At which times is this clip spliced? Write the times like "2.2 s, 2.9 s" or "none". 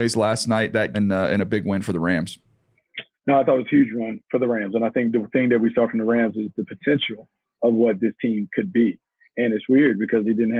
0.9 s